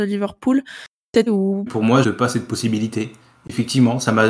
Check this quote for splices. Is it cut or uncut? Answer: cut